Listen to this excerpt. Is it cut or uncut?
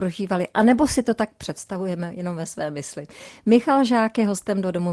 uncut